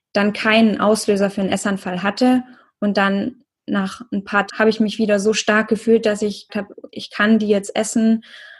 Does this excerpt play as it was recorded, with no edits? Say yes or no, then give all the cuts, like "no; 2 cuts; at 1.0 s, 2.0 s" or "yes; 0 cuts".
no; 2 cuts; at 4.5 s, 6.5 s